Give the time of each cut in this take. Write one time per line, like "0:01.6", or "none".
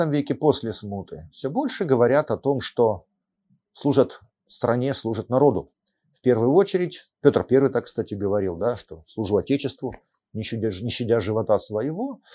0:04.3